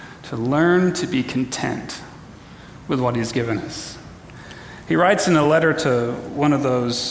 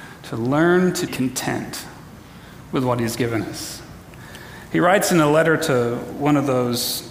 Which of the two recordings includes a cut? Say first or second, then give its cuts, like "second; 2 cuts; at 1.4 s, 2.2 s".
second; 1 cut; at 1.1 s